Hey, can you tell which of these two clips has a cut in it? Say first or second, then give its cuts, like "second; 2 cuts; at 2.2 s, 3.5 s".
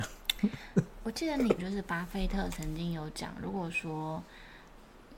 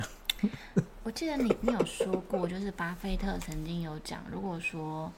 first; 1 cut; at 1.6 s